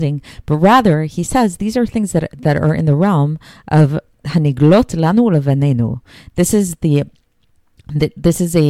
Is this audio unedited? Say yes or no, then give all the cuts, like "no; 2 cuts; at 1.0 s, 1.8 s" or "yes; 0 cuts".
yes; 0 cuts